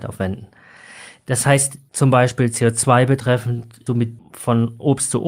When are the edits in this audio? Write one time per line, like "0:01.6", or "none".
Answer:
0:03.9
0:04.2